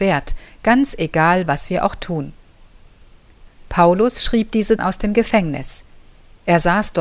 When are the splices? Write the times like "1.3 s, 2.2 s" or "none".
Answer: 4.8 s